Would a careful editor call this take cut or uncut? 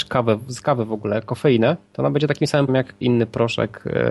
cut